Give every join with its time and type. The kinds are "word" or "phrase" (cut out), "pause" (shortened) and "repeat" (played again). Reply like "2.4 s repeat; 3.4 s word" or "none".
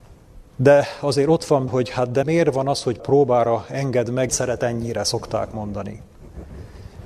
1.7 s word; 2.2 s word; 3.0 s word; 4.3 s word

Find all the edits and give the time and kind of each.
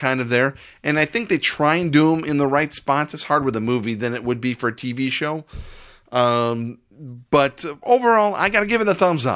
none

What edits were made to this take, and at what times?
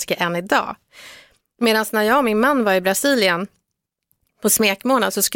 none

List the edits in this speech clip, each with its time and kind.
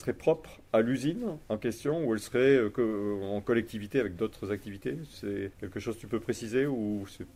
5.5 s pause

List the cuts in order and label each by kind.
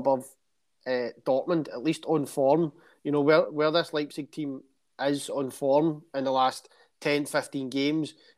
none

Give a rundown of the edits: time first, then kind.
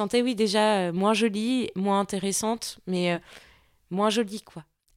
none

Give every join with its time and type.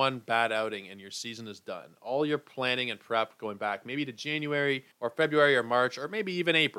4.9 s pause

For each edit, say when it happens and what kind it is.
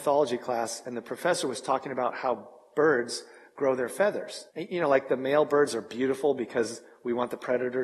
4.5 s pause

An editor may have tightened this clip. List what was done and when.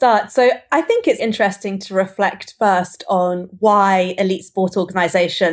1.2 s word

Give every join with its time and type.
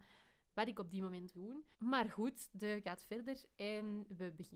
1.3 s phrase; 1.7 s pause; 2.8 s word

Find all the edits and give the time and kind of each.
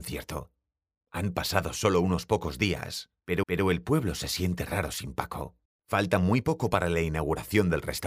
3.4 s repeat; 5.6 s pause

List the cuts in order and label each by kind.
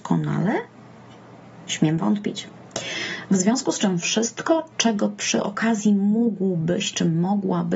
4.7 s pause

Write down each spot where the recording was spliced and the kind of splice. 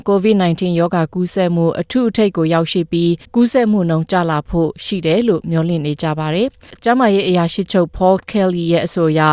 3.2 s pause

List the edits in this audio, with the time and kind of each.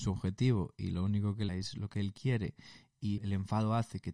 1.5 s word; 3.2 s word

